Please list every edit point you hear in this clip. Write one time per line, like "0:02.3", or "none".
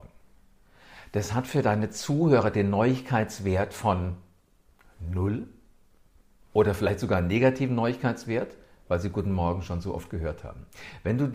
none